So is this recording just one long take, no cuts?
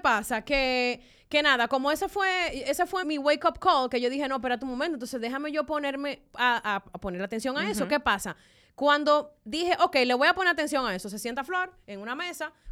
no; 2 cuts; at 3.0 s, 6.9 s

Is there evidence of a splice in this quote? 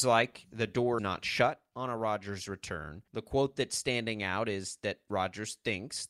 yes; 2 cuts; at 1.0 s, 3.1 s

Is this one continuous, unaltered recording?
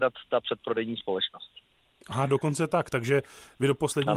yes; 0 cuts

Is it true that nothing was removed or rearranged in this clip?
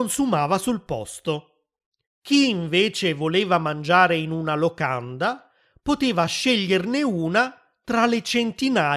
yes; 0 cuts

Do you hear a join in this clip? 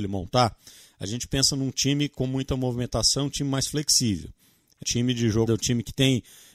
yes; 2 cuts; at 4.8 s, 5.5 s

